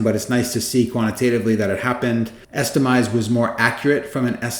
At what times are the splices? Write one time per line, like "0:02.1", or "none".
0:02.4